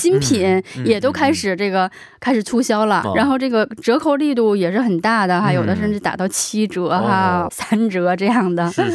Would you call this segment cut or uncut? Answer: cut